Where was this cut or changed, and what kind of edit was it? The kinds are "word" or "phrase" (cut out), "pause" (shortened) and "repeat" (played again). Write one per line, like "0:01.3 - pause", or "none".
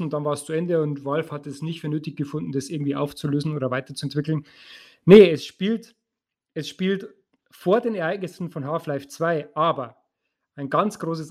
none